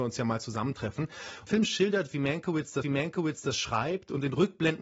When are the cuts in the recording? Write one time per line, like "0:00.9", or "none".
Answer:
0:01.5
0:02.8